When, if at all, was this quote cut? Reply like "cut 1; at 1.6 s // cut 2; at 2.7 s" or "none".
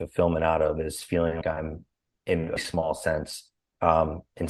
cut 1; at 1.4 s // cut 2; at 2.6 s